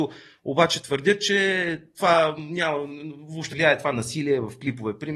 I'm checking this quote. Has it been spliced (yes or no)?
yes